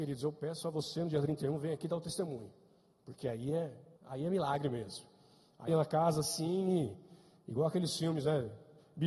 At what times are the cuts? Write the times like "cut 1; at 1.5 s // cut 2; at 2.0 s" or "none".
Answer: cut 1; at 4.0 s // cut 2; at 5.7 s

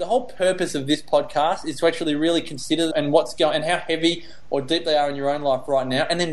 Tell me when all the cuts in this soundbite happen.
cut 1; at 2.9 s

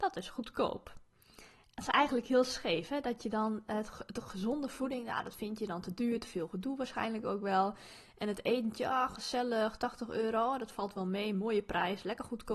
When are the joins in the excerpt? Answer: none

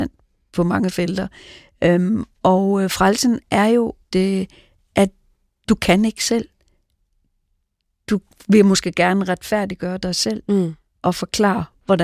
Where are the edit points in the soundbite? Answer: cut 1; at 4.0 s

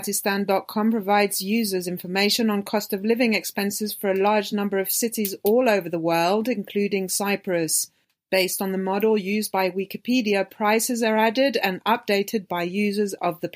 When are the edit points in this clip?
none

